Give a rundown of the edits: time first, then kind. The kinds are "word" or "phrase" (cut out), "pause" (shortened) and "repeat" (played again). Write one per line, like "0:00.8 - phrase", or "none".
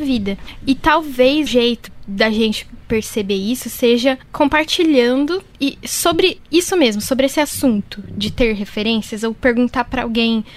0:01.5 - word